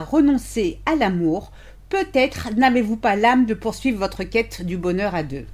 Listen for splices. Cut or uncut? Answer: uncut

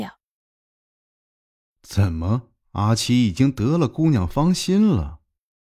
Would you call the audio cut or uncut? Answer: cut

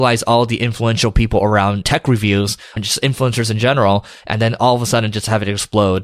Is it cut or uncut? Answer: uncut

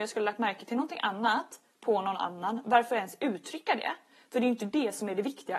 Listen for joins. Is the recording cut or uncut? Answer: uncut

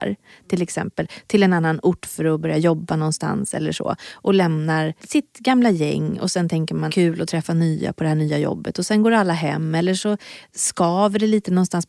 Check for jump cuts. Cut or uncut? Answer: cut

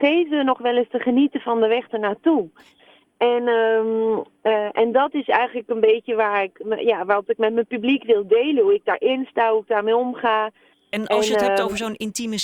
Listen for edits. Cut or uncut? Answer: uncut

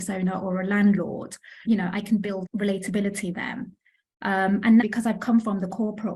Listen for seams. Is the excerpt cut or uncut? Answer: cut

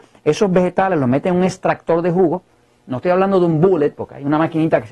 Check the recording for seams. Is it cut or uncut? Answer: uncut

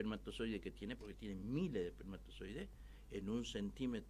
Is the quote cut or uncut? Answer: uncut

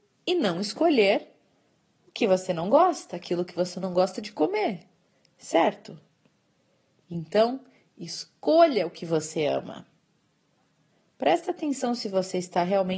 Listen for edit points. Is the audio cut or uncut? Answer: uncut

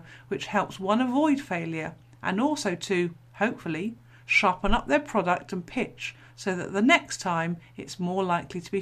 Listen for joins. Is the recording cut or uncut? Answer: uncut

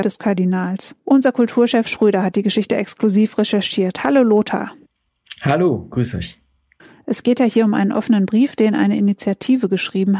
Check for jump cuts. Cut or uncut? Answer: cut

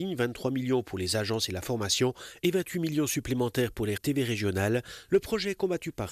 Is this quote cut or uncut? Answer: cut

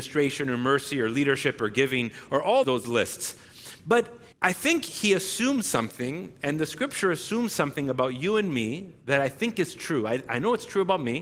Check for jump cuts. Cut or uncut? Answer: cut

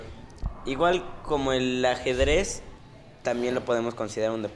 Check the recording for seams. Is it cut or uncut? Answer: uncut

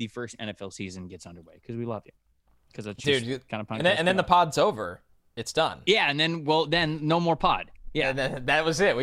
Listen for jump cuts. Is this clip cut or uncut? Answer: uncut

